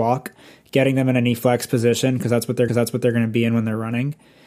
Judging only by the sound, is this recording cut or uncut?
cut